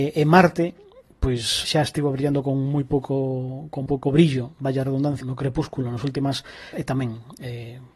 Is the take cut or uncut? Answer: cut